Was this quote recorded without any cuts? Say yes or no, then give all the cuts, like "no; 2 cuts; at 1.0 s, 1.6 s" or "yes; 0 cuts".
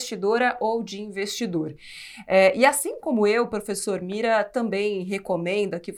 yes; 0 cuts